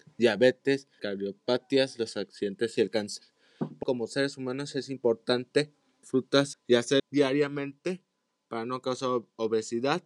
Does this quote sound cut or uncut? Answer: cut